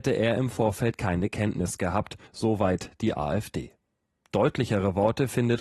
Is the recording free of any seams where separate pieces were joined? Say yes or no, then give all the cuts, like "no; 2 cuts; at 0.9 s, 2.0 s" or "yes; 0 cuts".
no; 1 cut; at 2.3 s